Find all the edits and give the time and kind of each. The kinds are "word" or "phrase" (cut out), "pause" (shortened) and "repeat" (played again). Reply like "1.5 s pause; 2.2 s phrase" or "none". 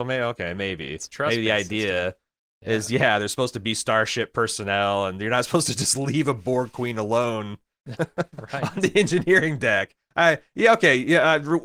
none

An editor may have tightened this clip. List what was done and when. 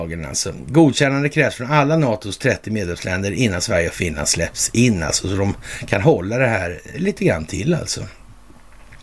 6.9 s word

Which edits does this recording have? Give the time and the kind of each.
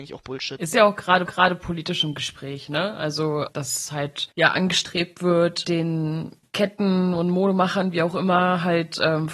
1.3 s repeat; 4.3 s pause; 5.6 s word

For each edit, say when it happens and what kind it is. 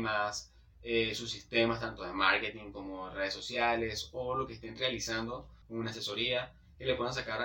5.6 s pause

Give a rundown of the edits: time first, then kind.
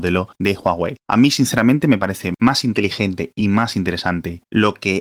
none

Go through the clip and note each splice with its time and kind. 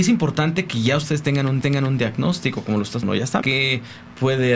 1.6 s repeat; 3.0 s word; 3.4 s word

